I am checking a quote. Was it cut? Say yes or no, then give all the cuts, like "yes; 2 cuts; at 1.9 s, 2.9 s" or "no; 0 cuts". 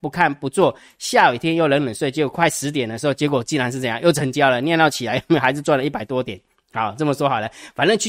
no; 0 cuts